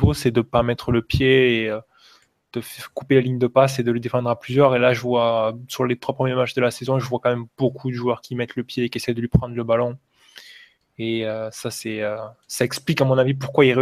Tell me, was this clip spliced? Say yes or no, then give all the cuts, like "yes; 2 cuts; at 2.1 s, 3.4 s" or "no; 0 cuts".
no; 0 cuts